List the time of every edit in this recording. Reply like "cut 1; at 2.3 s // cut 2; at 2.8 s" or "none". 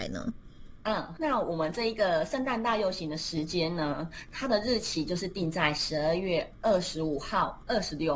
cut 1; at 1.2 s